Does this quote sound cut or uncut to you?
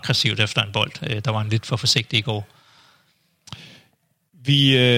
uncut